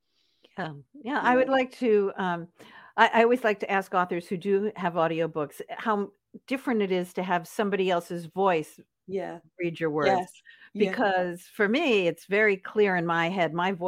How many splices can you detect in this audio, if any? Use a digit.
0